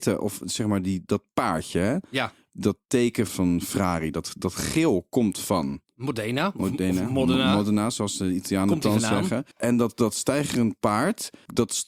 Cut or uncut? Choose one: cut